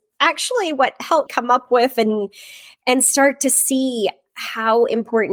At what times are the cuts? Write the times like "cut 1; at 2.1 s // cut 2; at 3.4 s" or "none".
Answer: cut 1; at 1.3 s